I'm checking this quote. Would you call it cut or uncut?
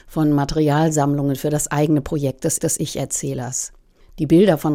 cut